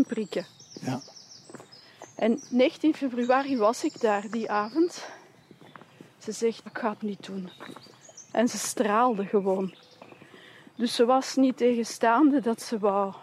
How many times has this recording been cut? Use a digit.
2